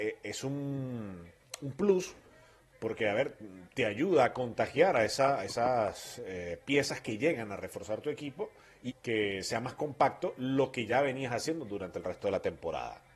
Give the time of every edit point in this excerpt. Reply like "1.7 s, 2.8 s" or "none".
8.9 s